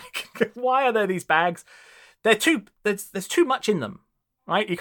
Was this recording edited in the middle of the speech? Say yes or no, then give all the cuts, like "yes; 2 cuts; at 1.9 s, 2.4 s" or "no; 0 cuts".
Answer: no; 0 cuts